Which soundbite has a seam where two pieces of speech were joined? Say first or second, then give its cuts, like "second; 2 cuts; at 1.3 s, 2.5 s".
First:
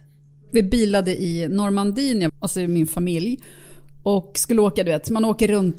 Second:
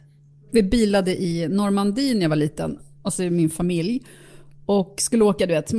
first; 1 cut; at 2.3 s